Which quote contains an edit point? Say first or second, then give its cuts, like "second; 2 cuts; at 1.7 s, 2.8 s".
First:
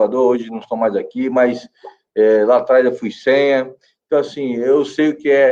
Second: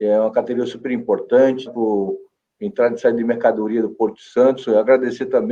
second; 1 cut; at 1.7 s